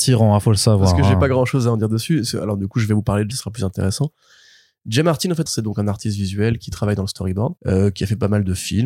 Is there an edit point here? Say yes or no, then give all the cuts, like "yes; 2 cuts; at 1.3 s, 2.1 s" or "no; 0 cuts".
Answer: yes; 3 cuts; at 3.3 s, 5.5 s, 7.6 s